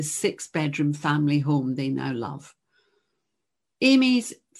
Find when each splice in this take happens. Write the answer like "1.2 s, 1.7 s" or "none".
none